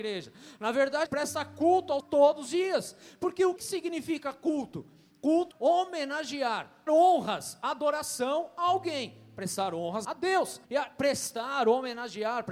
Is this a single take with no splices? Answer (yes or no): no